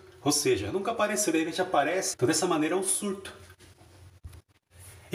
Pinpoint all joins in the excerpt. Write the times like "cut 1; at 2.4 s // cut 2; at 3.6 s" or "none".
cut 1; at 2.1 s